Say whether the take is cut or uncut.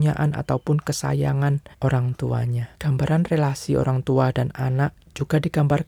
cut